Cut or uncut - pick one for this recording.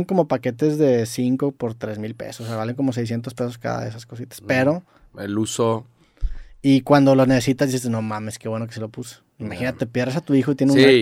uncut